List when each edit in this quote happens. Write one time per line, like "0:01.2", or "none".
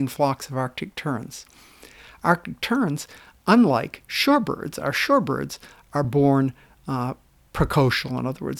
none